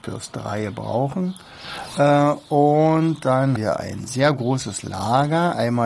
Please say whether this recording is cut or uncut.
cut